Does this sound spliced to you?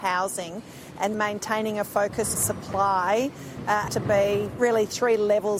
yes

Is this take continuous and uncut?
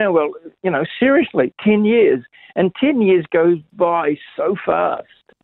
yes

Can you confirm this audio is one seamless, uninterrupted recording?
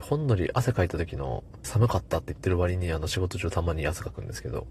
no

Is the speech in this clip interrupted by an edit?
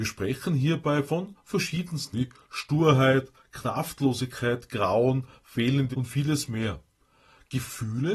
yes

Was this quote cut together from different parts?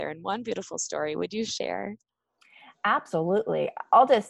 no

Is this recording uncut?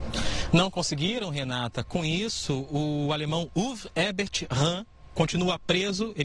yes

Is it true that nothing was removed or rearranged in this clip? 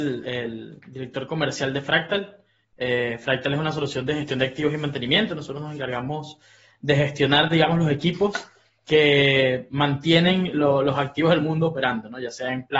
yes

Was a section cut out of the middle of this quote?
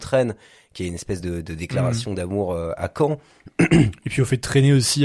no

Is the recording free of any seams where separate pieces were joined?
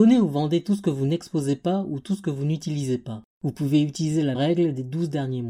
no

